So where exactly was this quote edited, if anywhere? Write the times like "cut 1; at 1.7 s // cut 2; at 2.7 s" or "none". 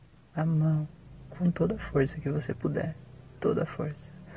none